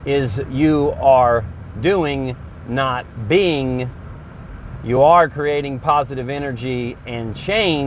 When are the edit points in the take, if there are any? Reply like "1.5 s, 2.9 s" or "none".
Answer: none